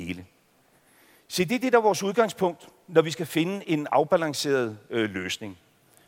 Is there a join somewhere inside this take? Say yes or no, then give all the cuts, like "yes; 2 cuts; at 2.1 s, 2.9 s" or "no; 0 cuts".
no; 0 cuts